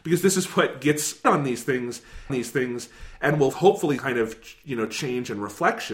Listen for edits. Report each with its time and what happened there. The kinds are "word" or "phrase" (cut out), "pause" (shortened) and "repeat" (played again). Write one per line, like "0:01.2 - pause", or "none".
0:01.2 - word
0:02.3 - repeat
0:03.5 - word
0:04.0 - word